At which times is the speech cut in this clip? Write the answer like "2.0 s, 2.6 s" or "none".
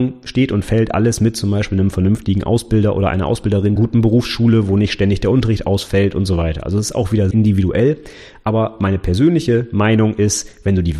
3.8 s, 7.3 s